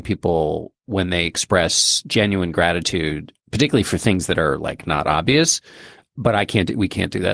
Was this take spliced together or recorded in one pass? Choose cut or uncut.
uncut